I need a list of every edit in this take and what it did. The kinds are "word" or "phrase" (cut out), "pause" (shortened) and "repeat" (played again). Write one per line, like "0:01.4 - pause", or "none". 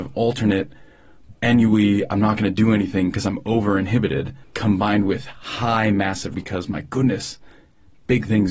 0:01.3 - word
0:04.4 - pause
0:06.3 - phrase